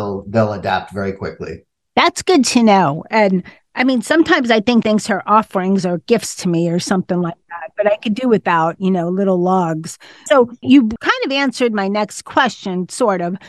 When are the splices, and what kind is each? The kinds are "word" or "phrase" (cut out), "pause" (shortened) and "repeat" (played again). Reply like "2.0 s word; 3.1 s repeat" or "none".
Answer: 4.8 s word